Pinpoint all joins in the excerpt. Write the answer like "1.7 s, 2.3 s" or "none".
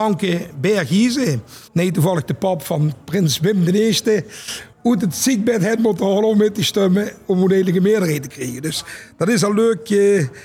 1.7 s, 4.7 s